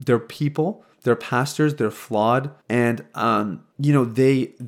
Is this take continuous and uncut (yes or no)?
no